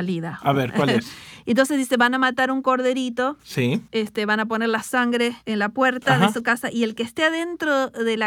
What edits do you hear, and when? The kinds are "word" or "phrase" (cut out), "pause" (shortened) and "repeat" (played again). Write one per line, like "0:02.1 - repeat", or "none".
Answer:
0:05.4 - pause